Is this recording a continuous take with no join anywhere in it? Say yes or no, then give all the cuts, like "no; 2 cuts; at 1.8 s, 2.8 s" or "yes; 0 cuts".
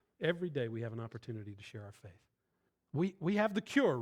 no; 1 cut; at 2.7 s